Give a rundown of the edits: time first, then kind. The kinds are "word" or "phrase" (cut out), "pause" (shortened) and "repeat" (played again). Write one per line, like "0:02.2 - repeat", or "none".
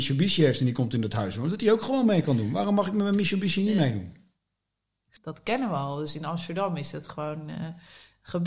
none